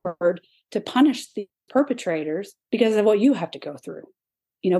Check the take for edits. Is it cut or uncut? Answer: cut